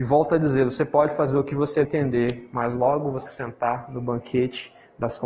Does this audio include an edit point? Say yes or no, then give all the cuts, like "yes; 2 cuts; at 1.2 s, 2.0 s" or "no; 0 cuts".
yes; 2 cuts; at 1.8 s, 3.3 s